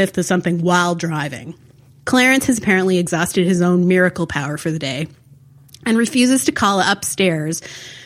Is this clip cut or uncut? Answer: uncut